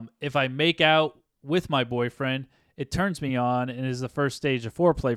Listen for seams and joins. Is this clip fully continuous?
yes; 0 cuts

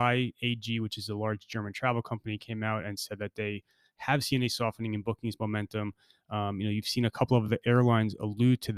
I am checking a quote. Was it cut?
no; 0 cuts

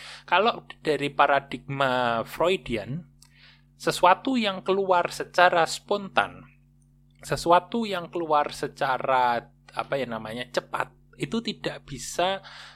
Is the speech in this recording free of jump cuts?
yes; 0 cuts

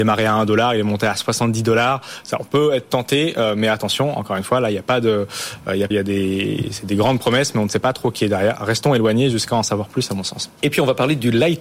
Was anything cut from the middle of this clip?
yes; 1 cut; at 5.9 s

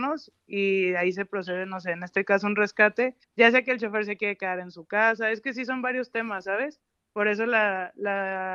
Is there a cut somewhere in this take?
yes; 1 cut; at 3.2 s

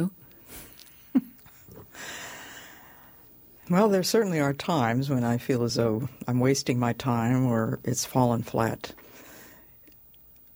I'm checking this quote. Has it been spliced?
no; 0 cuts

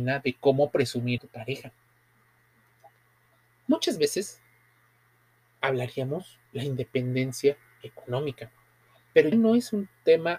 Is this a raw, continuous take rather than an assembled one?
no; 3 cuts; at 1.2 s, 6.5 s, 9.3 s

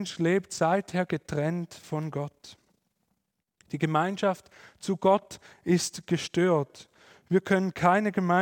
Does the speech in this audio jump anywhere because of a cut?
no; 0 cuts

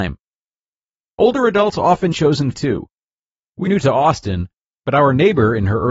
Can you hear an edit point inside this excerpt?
yes; 3 cuts; at 2.1 s, 2.5 s, 3.7 s

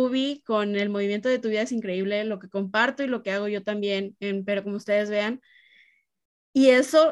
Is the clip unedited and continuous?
yes; 0 cuts

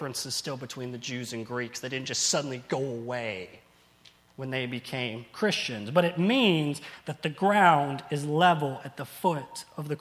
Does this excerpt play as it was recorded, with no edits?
yes; 0 cuts

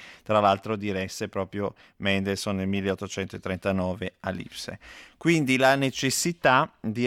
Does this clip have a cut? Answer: no; 0 cuts

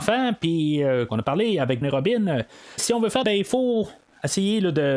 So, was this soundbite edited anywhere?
yes; 4 cuts; at 1.1 s, 1.8 s, 2.8 s, 3.2 s

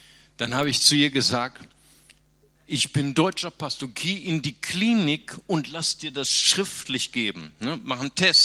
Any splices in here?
no; 0 cuts

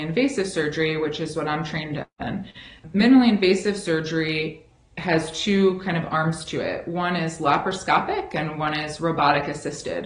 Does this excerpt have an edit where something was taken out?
no; 0 cuts

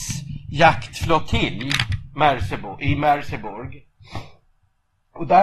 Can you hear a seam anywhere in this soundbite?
no; 0 cuts

